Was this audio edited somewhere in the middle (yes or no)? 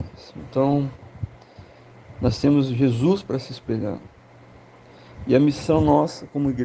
no